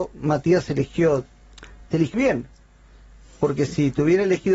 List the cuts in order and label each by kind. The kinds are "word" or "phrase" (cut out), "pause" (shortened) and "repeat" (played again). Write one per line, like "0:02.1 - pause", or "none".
0:02.1 - word